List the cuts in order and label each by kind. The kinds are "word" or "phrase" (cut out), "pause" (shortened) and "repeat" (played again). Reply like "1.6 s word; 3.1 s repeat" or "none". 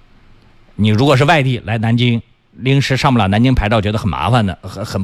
none